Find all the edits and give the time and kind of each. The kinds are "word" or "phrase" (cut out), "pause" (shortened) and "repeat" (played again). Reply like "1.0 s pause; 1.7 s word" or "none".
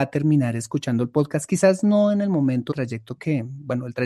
2.7 s word